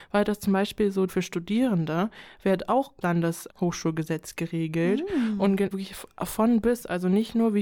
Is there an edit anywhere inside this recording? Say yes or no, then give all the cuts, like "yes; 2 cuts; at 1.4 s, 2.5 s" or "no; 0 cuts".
yes; 4 cuts; at 1.1 s, 3.0 s, 3.5 s, 5.7 s